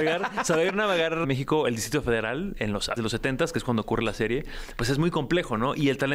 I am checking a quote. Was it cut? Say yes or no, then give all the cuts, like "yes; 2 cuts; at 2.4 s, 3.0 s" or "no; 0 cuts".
yes; 2 cuts; at 1.2 s, 3.0 s